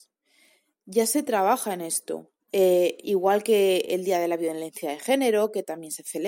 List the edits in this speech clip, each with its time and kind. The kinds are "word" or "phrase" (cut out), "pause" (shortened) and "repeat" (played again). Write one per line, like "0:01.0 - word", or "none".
0:02.4 - pause